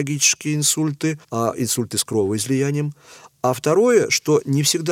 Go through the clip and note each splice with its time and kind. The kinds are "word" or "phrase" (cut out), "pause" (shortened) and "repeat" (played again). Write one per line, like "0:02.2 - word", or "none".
0:01.2 - pause